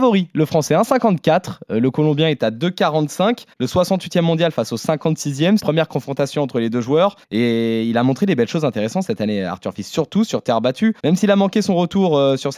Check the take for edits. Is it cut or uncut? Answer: cut